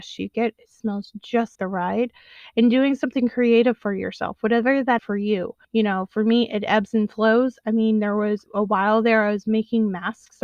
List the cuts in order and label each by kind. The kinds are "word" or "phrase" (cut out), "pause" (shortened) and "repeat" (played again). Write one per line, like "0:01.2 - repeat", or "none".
0:01.6 - word
0:05.0 - word
0:05.6 - pause
0:08.5 - word